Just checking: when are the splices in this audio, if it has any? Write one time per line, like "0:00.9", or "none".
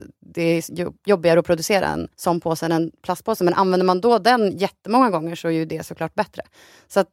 0:02.1

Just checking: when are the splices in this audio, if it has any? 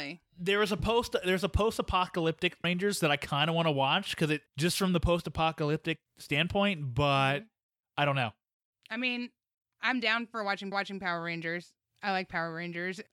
0:02.6
0:04.5
0:06.1
0:10.7

